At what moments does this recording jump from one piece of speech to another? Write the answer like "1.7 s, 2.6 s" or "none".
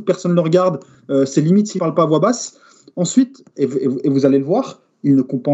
none

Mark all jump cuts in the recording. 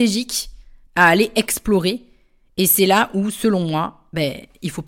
none

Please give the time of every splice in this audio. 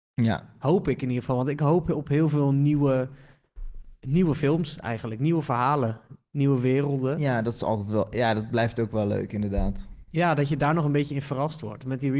none

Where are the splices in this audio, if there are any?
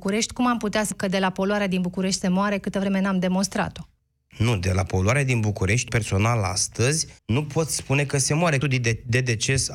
0.9 s, 4.0 s, 5.9 s, 7.2 s, 8.6 s

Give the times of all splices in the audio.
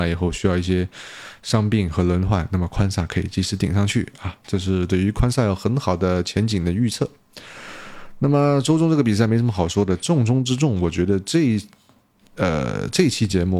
none

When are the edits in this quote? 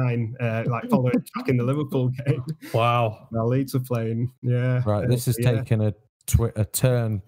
none

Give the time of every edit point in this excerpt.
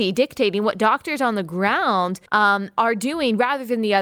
2.3 s

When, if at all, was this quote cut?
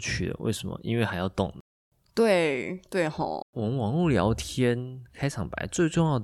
1.8 s, 3.4 s

